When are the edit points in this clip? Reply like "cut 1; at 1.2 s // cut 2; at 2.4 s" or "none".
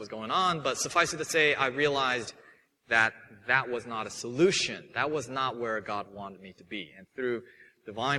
none